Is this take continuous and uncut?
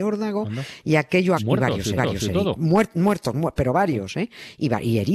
no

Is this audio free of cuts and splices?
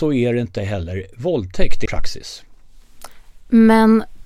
no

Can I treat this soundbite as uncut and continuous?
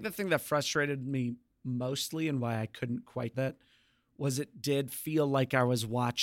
no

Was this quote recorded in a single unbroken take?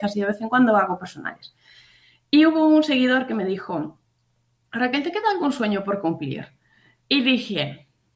yes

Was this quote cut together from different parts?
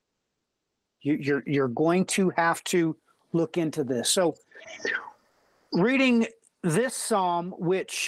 no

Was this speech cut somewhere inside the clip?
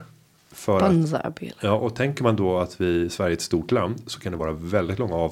no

